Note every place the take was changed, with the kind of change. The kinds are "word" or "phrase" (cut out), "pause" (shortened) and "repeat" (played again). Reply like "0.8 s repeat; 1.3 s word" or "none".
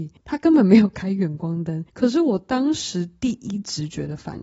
1.9 s pause